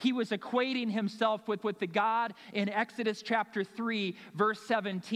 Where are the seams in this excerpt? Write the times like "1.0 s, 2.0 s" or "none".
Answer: 1.6 s